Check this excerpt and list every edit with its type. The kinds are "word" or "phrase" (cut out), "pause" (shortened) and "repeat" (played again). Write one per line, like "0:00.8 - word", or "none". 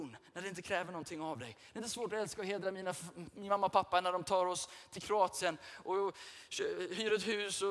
none